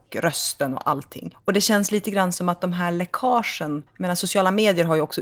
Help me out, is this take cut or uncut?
uncut